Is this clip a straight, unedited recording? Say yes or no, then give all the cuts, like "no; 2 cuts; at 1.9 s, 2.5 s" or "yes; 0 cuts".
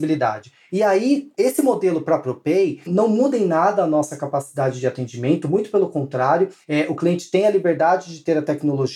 yes; 0 cuts